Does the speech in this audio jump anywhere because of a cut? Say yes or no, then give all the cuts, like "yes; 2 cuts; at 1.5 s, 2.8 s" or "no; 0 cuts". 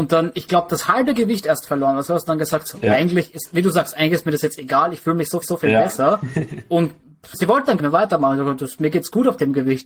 yes; 3 cuts; at 5.4 s, 7.3 s, 7.8 s